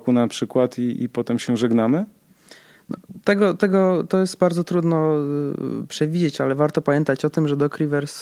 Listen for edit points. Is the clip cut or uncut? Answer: uncut